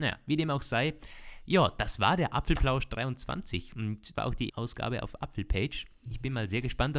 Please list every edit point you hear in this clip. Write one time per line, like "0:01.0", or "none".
0:04.1
0:04.5